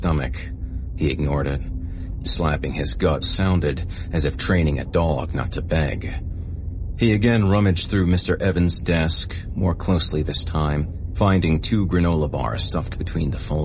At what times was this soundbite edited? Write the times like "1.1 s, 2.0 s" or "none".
2.2 s, 3.2 s